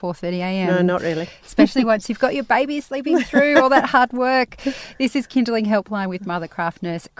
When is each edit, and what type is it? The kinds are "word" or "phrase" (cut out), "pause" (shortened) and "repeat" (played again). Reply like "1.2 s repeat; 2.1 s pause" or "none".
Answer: none